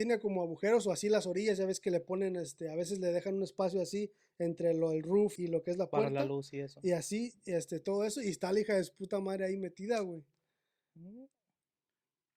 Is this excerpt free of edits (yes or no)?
no